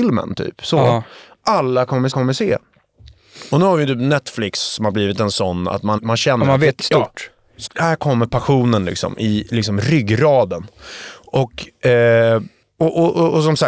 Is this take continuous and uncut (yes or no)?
no